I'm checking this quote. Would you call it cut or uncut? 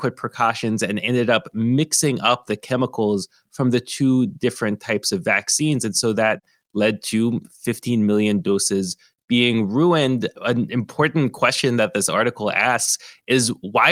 uncut